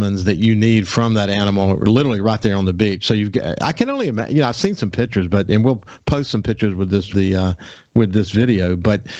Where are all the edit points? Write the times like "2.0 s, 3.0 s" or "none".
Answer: 7.1 s